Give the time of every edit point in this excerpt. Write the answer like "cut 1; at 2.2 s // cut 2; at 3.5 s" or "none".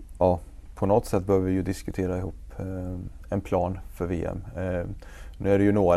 cut 1; at 3.2 s